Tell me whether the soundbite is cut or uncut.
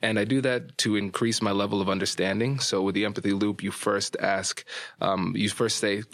uncut